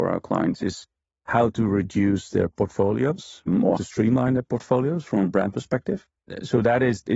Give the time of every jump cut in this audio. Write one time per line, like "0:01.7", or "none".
0:03.8